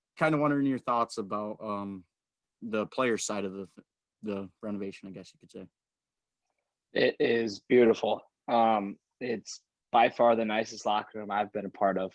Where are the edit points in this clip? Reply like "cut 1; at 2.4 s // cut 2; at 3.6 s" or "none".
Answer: none